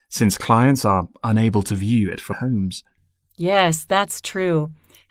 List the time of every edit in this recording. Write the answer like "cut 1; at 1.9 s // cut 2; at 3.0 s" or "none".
cut 1; at 2.3 s